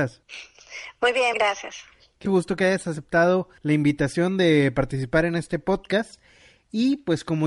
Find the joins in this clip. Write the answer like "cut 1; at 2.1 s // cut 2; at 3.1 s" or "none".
cut 1; at 1.3 s // cut 2; at 2.3 s // cut 3; at 3.6 s